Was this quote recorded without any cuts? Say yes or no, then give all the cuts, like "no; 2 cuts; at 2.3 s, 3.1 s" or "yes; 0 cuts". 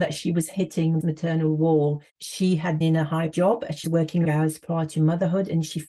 no; 5 cuts; at 1.0 s, 2.8 s, 3.3 s, 3.8 s, 4.2 s